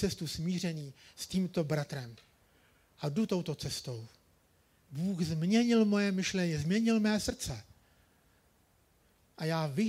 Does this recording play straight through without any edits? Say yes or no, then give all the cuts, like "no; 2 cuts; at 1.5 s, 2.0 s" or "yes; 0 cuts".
yes; 0 cuts